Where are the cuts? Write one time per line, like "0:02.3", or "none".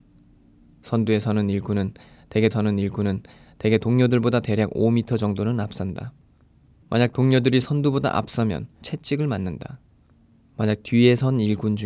0:02.5
0:08.8